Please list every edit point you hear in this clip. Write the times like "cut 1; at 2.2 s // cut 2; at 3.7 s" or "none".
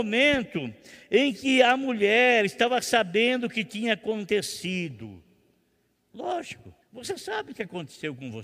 cut 1; at 6.8 s

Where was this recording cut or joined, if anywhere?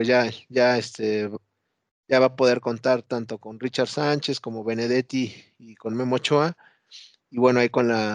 none

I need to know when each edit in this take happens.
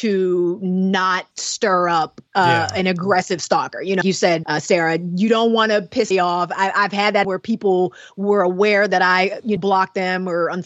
cut 1; at 1.3 s // cut 2; at 2.3 s // cut 3; at 4.0 s // cut 4; at 4.4 s // cut 5; at 6.1 s // cut 6; at 7.2 s // cut 7; at 9.6 s

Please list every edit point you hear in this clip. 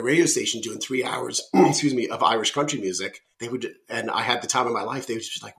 cut 1; at 3.3 s

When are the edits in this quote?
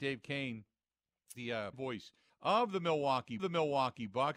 cut 1; at 1.3 s // cut 2; at 1.7 s // cut 3; at 2.3 s // cut 4; at 3.4 s

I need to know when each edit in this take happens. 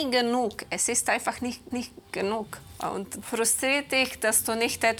cut 1; at 1.7 s // cut 2; at 3.2 s

